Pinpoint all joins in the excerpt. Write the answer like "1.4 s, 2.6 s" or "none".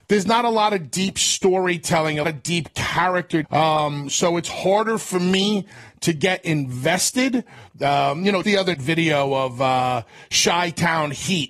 2.2 s, 3.4 s, 8.4 s, 8.7 s